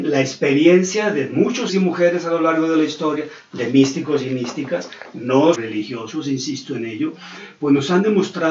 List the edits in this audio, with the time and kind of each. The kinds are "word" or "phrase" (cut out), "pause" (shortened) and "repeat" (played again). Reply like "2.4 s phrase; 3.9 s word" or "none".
1.7 s word; 5.5 s word